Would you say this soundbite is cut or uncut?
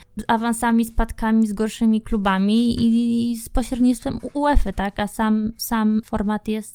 uncut